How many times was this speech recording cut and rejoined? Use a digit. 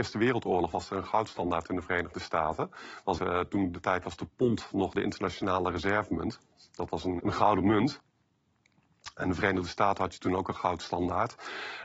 3